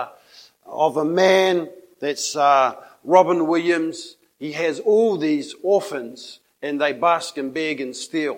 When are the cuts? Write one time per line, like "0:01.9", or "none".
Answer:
none